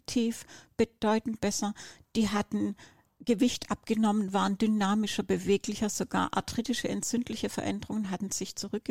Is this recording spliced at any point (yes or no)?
no